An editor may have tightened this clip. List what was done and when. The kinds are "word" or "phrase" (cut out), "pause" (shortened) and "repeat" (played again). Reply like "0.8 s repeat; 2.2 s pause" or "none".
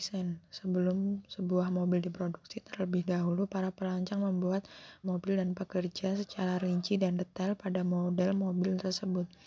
5.0 s word